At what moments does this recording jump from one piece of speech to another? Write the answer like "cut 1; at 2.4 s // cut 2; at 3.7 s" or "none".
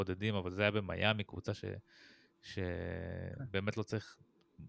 cut 1; at 1.3 s